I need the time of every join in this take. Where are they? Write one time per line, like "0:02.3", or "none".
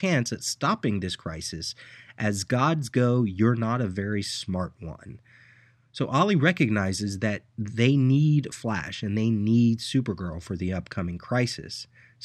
none